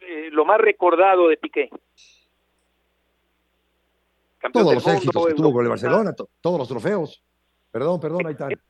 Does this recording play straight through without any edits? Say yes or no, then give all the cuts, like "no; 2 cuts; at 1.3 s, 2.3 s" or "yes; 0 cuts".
yes; 0 cuts